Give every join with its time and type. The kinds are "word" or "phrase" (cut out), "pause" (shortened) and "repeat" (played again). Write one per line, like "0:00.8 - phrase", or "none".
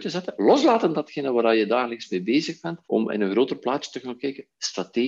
0:02.8 - pause